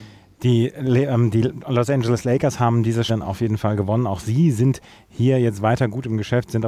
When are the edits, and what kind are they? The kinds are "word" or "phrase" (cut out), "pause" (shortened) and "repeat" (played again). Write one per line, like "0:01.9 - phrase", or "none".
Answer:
0:03.1 - word